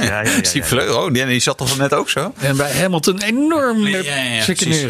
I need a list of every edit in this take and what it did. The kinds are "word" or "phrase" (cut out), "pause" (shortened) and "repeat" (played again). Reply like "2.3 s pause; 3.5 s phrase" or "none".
3.9 s word